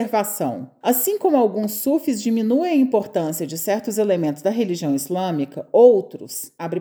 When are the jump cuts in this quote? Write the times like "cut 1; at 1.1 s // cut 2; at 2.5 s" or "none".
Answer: none